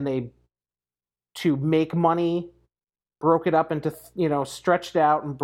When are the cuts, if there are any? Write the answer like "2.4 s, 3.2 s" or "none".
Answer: none